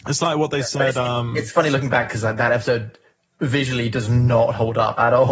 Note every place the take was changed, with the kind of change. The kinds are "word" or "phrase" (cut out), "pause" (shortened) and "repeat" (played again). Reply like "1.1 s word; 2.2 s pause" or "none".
none